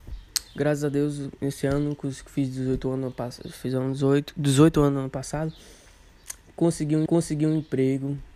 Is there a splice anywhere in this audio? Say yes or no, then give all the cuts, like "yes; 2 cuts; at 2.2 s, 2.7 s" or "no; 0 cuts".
yes; 1 cut; at 7.1 s